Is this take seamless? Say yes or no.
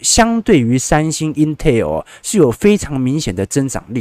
yes